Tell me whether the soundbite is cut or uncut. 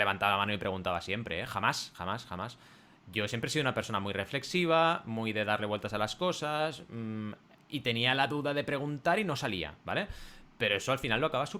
uncut